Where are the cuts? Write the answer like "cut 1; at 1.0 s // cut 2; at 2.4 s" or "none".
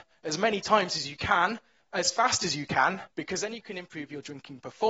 cut 1; at 3.1 s